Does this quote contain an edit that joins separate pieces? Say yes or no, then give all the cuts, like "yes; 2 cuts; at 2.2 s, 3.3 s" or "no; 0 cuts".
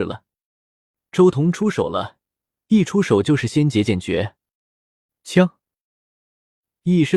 no; 0 cuts